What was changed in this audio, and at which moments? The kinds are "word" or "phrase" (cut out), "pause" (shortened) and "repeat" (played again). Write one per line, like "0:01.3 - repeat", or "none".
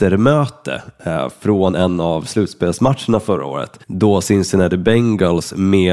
0:03.8 - pause